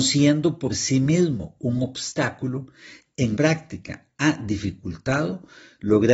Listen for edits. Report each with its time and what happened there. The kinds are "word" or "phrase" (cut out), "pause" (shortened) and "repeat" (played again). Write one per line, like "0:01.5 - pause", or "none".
0:03.3 - word

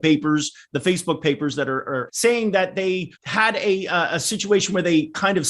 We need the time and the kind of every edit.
0:02.1 - word
0:03.2 - pause

